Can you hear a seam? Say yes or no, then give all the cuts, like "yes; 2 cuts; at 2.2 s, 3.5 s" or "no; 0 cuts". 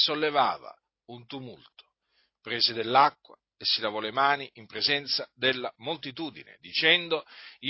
no; 0 cuts